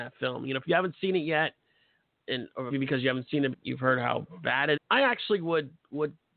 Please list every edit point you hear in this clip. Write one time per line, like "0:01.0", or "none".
0:02.7
0:03.5
0:04.8